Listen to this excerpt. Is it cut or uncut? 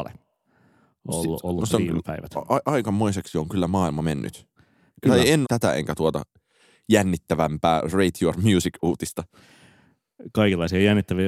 cut